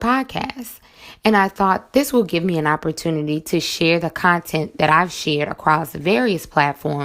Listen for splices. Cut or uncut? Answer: uncut